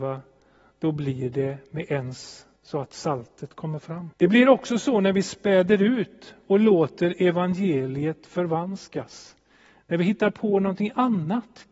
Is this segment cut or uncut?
cut